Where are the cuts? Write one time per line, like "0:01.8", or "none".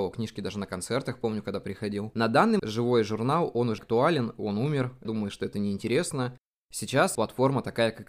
0:02.6
0:03.8
0:05.0
0:07.1